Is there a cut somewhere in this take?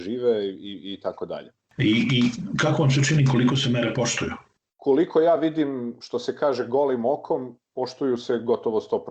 no; 0 cuts

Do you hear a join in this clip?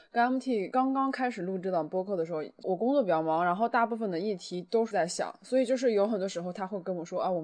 yes; 1 cut; at 4.9 s

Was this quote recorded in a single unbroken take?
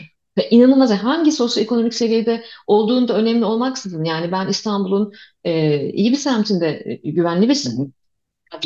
yes; 0 cuts

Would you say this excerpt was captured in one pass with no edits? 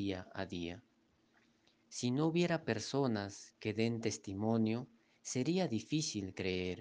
yes; 0 cuts

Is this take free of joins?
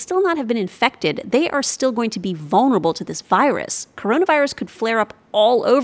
yes; 0 cuts

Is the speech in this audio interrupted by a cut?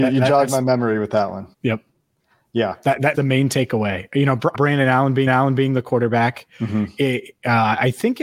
yes; 5 cuts; at 1.5 s, 3.1 s, 4.5 s, 5.3 s, 6.5 s

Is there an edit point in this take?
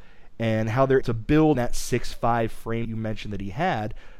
yes; 3 cuts; at 1.0 s, 1.5 s, 2.8 s

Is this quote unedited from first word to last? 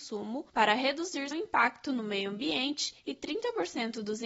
no; 1 cut; at 1.3 s

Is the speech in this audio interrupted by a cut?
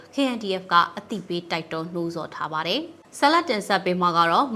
yes; 1 cut; at 3.0 s

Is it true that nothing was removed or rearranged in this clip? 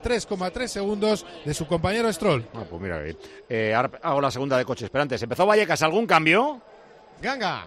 yes; 0 cuts

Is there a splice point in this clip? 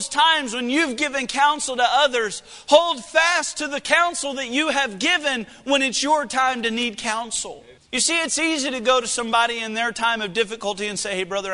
yes; 1 cut; at 7.8 s

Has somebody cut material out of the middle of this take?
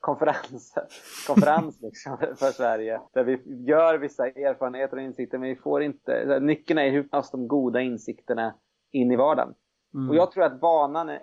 yes; 3 cuts; at 2.2 s, 3.1 s, 7.1 s

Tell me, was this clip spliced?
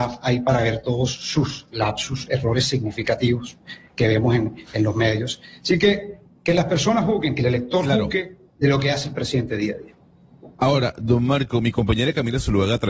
yes; 1 cut; at 10.5 s

